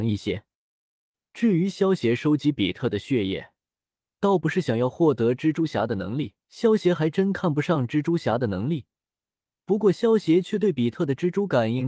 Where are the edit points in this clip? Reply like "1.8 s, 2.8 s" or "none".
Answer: 6.4 s